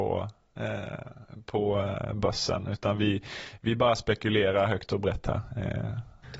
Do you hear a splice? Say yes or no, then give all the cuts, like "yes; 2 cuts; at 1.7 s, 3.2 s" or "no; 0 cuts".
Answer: no; 0 cuts